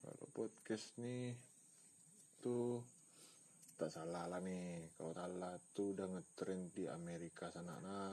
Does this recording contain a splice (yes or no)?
yes